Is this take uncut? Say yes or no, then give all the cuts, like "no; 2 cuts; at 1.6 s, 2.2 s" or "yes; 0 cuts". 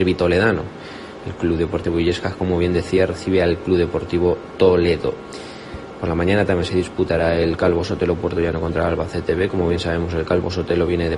yes; 0 cuts